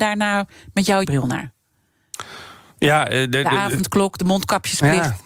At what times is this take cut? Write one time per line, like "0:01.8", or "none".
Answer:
0:01.0